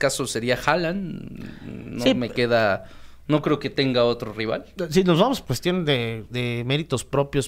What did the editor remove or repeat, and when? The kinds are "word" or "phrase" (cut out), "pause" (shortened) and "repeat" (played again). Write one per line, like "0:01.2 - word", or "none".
0:05.4 - word
0:06.3 - word

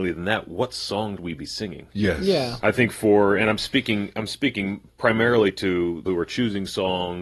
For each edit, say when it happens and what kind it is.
0:01.2 - word
0:06.1 - word

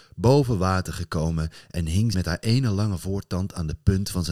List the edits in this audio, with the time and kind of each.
0:02.1 - word

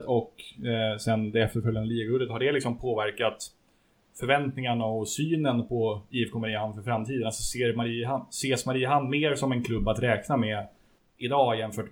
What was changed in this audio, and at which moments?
none

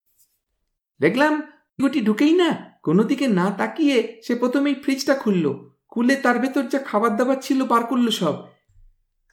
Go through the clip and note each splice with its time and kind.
0:01.8 - word

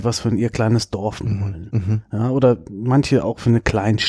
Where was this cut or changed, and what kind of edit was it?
0:01.2 - word

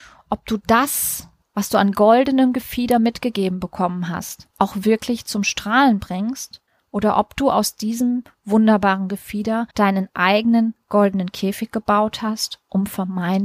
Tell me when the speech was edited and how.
0:01.4 - pause
0:04.5 - pause
0:06.7 - pause
0:09.7 - pause

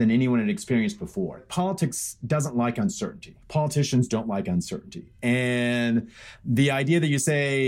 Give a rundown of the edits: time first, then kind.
0:03.4 - pause

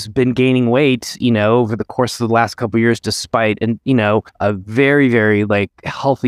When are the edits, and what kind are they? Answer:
0:04.3 - pause

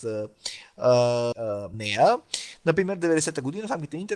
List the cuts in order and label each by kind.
0:01.3 - word
0:01.7 - word

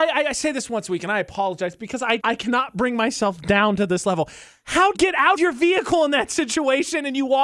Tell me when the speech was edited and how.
0:02.2 - word
0:04.9 - word
0:05.3 - word

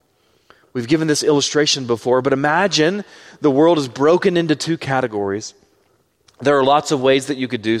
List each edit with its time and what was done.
none

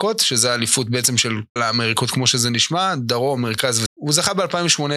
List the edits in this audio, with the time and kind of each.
0:01.6 - word
0:03.9 - word

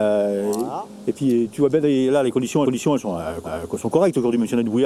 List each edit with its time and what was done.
0:02.6 - repeat
0:03.4 - repeat

